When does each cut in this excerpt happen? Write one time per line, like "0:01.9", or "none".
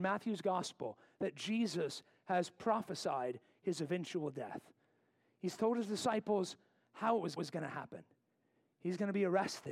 0:07.4